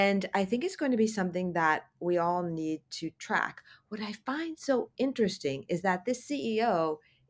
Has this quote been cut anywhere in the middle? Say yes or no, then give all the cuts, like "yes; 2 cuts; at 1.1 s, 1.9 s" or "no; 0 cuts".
no; 0 cuts